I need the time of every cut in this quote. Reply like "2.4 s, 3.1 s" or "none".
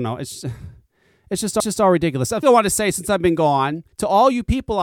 1.6 s, 2.4 s, 3.9 s